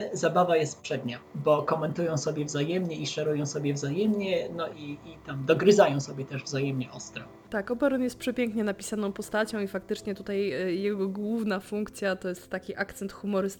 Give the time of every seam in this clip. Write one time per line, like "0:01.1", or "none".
none